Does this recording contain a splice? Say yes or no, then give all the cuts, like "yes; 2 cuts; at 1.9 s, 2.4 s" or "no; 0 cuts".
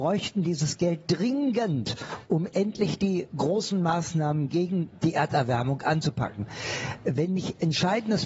no; 0 cuts